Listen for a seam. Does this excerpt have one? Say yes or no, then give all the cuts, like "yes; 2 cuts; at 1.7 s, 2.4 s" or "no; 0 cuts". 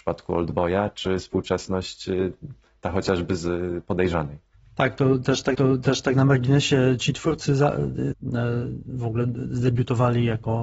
yes; 2 cuts; at 5.5 s, 8.1 s